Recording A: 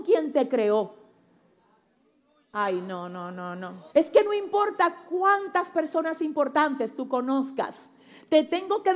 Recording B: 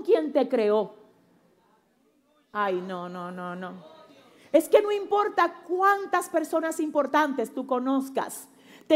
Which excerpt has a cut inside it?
A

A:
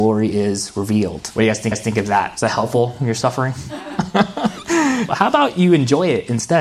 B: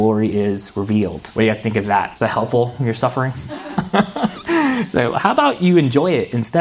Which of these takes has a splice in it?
A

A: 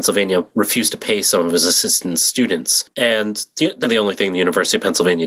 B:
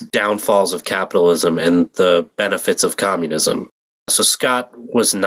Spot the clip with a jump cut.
A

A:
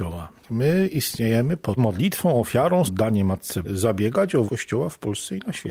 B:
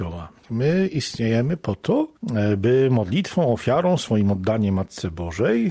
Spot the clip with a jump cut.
A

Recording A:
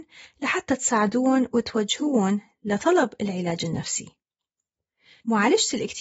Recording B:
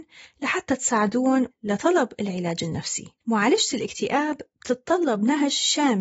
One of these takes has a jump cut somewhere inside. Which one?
B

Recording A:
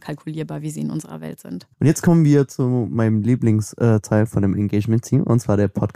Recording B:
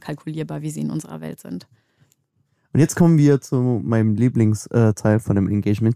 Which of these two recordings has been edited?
A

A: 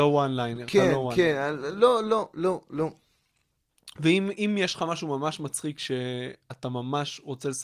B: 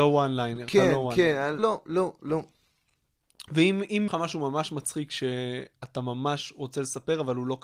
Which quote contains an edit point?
B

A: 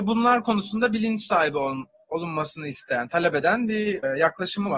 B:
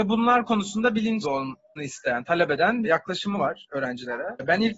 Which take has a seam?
B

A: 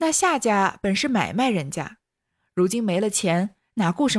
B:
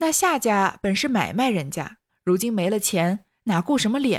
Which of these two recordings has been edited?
B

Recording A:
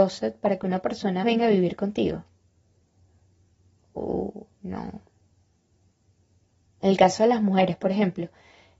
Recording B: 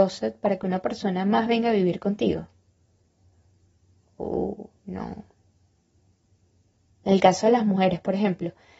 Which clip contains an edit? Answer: A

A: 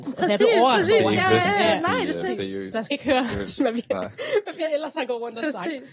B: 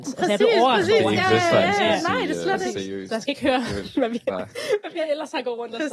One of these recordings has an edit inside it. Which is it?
A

